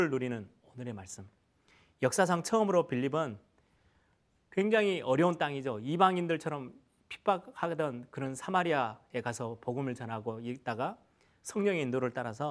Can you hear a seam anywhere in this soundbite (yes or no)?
no